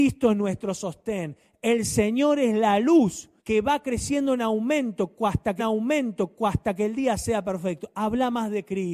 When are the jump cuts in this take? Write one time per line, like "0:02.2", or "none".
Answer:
0:03.4
0:05.6